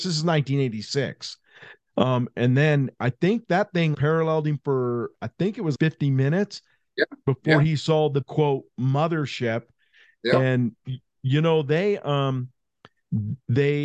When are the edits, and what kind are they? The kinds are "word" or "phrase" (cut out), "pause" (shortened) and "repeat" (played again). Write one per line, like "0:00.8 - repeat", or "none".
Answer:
0:03.9 - word
0:05.7 - word
0:08.2 - word